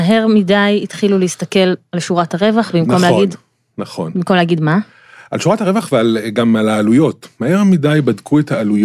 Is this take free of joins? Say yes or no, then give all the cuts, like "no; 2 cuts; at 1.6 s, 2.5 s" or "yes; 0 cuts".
yes; 0 cuts